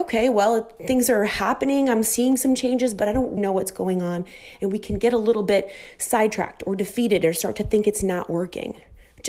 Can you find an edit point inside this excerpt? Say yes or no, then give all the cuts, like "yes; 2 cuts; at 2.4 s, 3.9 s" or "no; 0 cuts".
yes; 1 cut; at 3.4 s